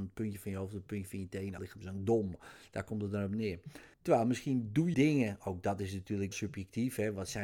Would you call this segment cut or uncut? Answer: cut